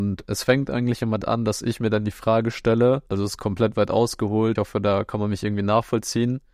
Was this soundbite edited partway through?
yes; 3 cuts; at 1.2 s, 3.1 s, 4.6 s

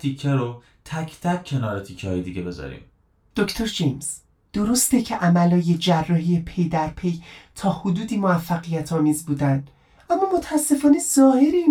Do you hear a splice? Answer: no; 0 cuts

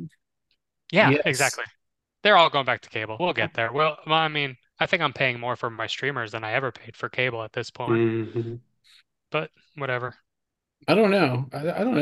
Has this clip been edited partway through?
yes; 1 cut; at 3.2 s

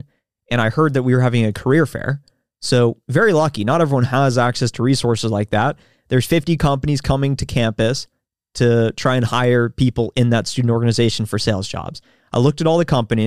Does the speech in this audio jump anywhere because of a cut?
no; 0 cuts

